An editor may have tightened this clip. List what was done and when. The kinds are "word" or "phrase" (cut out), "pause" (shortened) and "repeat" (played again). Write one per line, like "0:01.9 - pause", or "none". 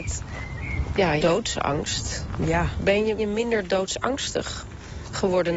0:01.2 - word
0:03.2 - word

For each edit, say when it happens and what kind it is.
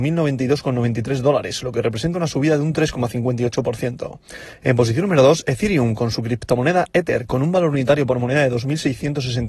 none

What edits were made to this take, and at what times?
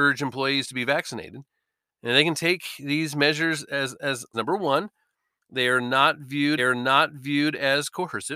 0:04.3 - phrase
0:06.6 - repeat

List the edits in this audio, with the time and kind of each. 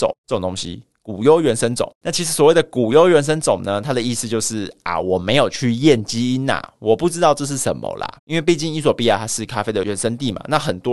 0:01.9 - pause
0:08.2 - pause

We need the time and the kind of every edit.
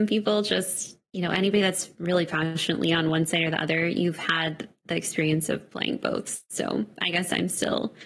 none

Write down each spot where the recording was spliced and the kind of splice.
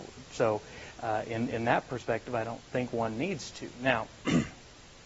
none

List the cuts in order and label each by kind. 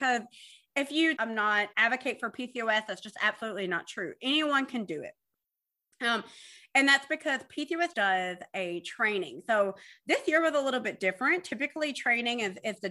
0:01.2 - phrase
0:01.7 - phrase
0:07.9 - word

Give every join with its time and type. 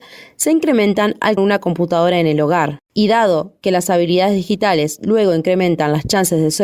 0:01.4 - phrase
0:02.8 - pause

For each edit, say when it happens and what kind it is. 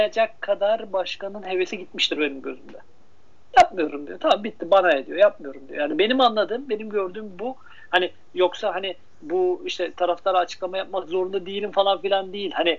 none

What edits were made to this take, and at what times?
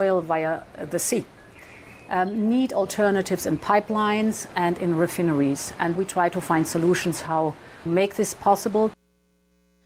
0:06.0 - word
0:07.9 - word

